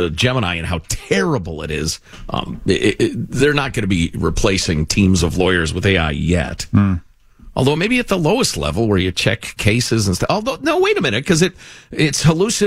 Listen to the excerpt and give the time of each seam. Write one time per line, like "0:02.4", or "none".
none